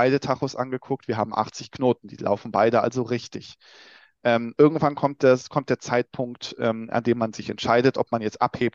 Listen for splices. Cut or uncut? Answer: uncut